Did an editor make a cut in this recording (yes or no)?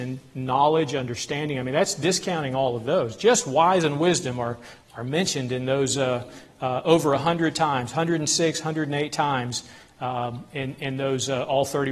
no